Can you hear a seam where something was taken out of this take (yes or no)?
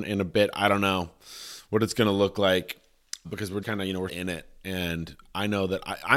yes